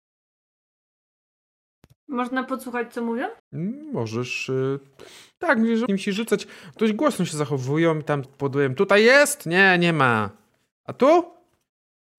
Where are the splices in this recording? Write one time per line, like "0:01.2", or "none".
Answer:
0:03.4
0:05.9
0:08.2